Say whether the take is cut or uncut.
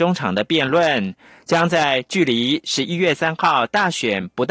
uncut